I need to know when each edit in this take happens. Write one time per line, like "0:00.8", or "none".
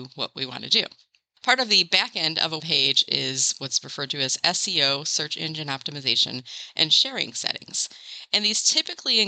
0:02.6